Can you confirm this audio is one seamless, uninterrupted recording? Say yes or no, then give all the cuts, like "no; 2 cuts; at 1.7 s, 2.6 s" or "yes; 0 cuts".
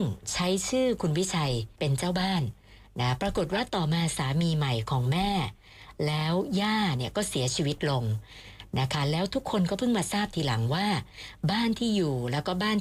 no; 1 cut; at 1.8 s